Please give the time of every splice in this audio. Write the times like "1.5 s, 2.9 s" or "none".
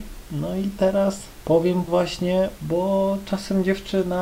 1.9 s, 2.6 s